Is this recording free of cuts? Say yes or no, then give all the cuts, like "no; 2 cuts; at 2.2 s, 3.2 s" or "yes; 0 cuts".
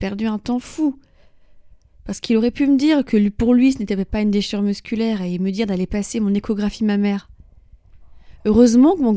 yes; 0 cuts